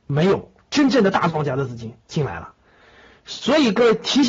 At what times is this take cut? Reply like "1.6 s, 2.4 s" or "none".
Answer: 2.0 s